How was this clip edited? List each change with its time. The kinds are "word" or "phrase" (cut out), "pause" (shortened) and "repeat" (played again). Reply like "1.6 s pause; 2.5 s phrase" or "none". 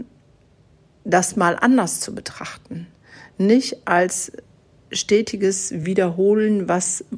none